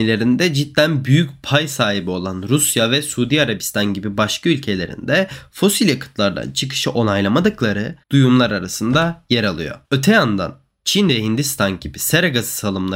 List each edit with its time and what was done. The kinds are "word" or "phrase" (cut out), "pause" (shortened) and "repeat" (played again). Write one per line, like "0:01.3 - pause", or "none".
0:08.0 - pause
0:09.8 - pause